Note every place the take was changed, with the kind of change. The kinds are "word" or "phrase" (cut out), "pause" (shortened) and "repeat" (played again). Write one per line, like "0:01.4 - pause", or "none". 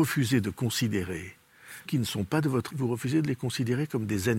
0:01.9 - word
0:02.7 - word